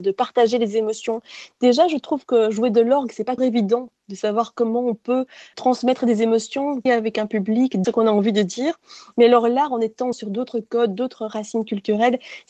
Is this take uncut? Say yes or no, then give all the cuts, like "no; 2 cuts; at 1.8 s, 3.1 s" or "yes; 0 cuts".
no; 5 cuts; at 3.4 s, 5.5 s, 6.9 s, 7.8 s, 10.1 s